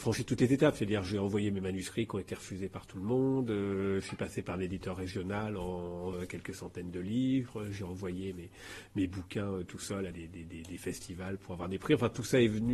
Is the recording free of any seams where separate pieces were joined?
no; 2 cuts; at 6.1 s, 10.1 s

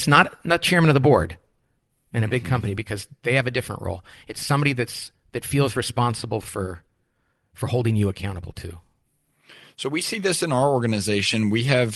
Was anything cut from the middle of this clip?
no; 0 cuts

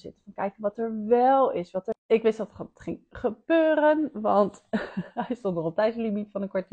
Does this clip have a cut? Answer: no; 0 cuts

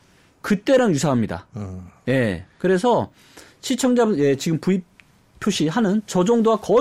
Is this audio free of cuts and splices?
yes; 0 cuts

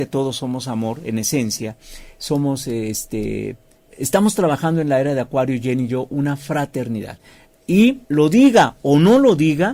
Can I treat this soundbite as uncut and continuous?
no; 1 cut; at 8.0 s

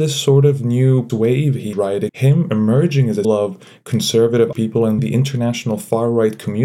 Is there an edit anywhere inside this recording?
yes; 6 cuts; at 1.1 s, 1.7 s, 2.1 s, 3.2 s, 4.5 s, 5.0 s

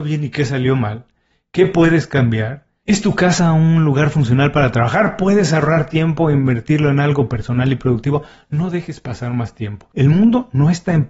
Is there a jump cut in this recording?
no; 0 cuts

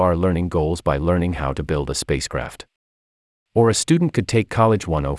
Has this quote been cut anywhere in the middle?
no; 0 cuts

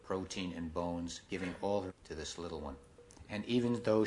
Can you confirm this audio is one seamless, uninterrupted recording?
no; 2 cuts; at 1.3 s, 1.9 s

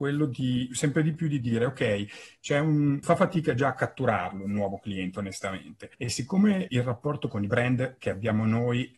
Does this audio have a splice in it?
yes; 3 cuts; at 3.0 s, 5.9 s, 6.7 s

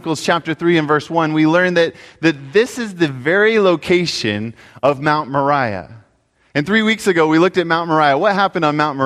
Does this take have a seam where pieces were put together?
no; 0 cuts

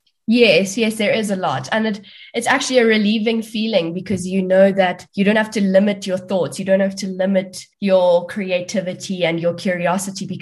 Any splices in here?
yes; 2 cuts; at 5.1 s, 7.7 s

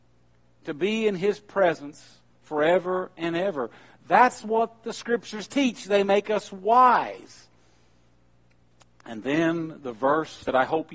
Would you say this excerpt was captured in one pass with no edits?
yes; 0 cuts

